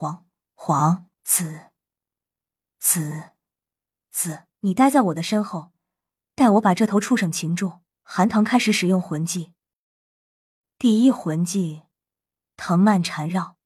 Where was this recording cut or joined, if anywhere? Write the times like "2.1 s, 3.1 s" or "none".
1.1 s, 4.5 s, 7.9 s